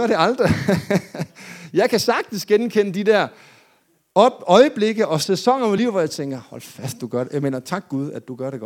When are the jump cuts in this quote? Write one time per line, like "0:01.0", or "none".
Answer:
none